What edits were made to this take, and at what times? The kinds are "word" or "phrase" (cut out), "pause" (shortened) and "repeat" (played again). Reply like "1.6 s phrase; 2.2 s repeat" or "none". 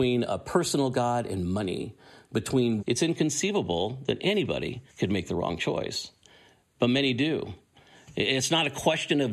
2.8 s phrase; 4.9 s pause